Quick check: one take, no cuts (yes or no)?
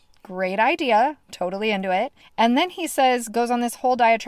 no